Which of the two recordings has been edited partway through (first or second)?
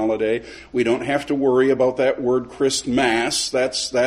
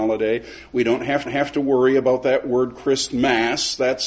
second